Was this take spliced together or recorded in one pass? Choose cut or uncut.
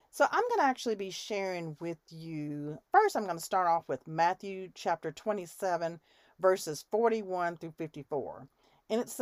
uncut